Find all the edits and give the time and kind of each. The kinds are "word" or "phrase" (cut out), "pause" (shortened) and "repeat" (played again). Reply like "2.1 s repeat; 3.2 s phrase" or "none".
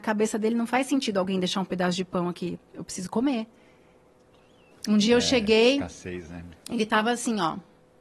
none